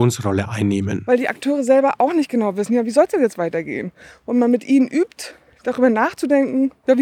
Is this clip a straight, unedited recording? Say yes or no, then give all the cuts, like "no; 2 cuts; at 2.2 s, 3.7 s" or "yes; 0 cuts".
yes; 0 cuts